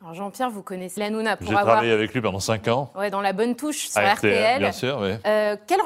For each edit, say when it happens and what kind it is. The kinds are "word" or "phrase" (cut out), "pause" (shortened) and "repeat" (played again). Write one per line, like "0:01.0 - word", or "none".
0:01.0 - phrase

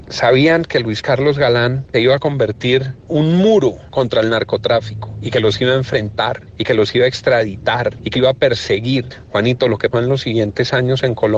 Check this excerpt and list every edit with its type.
0:01.9 - word
0:03.1 - word
0:08.1 - word
0:09.9 - word

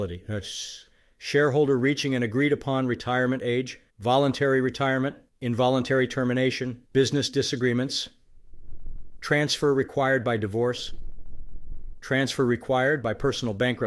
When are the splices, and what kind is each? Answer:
0:03.9 - pause
0:05.3 - pause
0:06.9 - pause

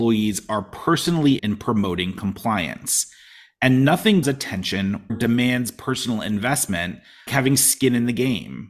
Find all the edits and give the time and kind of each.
0:01.4 - word
0:04.2 - word
0:05.1 - word
0:07.3 - word

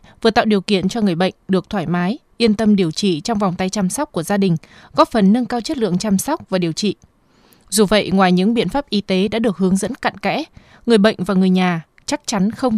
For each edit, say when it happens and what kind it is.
none

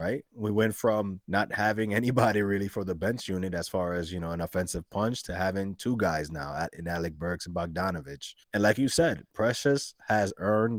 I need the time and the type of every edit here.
0:01.2 - pause
0:08.4 - pause

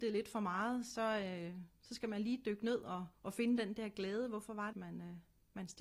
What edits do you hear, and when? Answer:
0:03.1 - pause
0:04.7 - word

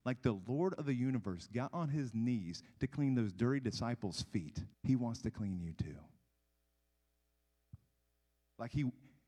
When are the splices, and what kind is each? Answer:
0:04.7 - pause

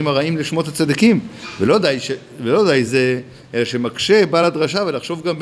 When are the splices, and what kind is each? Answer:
none

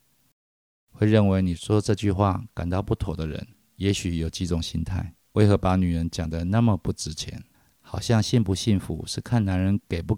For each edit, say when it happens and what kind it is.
0:03.5 - pause
0:05.2 - pause
0:07.5 - pause

